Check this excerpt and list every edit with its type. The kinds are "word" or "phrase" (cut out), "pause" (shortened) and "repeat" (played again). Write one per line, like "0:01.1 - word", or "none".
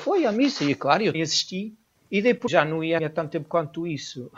0:01.1 - word
0:02.5 - word
0:03.0 - word